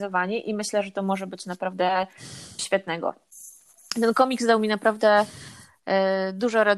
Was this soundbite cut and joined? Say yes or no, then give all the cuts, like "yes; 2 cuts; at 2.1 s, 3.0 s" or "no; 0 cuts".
yes; 1 cut; at 2.6 s